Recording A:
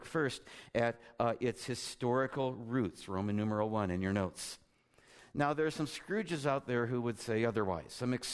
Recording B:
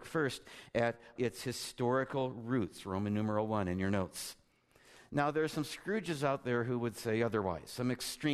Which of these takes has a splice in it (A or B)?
B